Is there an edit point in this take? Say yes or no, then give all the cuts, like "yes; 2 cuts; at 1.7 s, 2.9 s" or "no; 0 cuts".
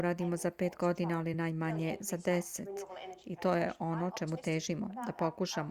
no; 0 cuts